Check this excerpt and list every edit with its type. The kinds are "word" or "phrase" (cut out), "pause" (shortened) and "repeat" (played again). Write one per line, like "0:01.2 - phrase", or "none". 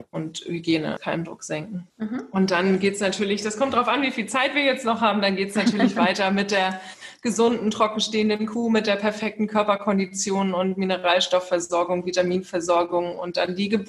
0:01.0 - word
0:01.9 - pause